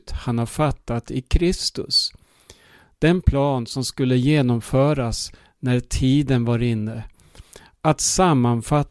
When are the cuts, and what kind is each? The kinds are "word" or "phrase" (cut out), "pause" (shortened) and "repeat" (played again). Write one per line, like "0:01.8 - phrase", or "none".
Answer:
none